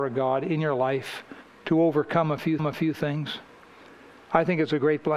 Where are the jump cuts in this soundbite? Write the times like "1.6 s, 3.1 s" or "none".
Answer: 1.4 s, 2.6 s